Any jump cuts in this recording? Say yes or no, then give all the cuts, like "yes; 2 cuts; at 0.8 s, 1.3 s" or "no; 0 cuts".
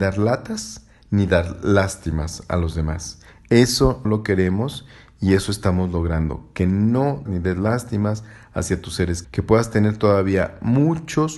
yes; 3 cuts; at 4.0 s, 7.3 s, 9.2 s